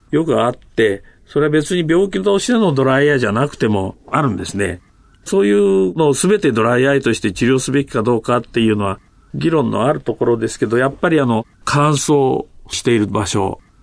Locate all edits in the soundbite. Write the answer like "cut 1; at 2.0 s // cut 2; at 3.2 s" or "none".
cut 1; at 11.5 s